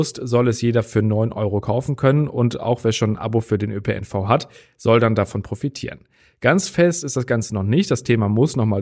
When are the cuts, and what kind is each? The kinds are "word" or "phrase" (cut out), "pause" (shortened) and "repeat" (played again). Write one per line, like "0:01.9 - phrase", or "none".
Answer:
none